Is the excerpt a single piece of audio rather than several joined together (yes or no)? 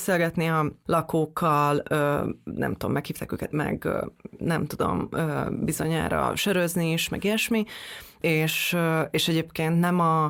no